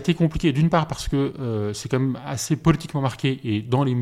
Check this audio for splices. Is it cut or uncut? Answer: uncut